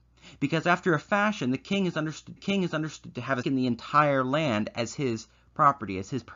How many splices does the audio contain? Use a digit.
2